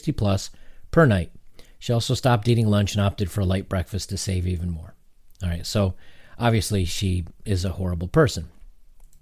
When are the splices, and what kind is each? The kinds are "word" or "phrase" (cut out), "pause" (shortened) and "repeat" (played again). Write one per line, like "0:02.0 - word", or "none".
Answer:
none